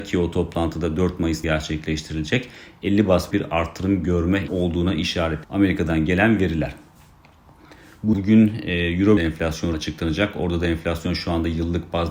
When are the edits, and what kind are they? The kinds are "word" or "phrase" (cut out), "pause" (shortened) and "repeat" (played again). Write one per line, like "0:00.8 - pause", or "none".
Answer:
0:01.4 - word
0:03.3 - word
0:04.5 - word
0:05.4 - word
0:08.1 - word
0:09.2 - word
0:09.7 - word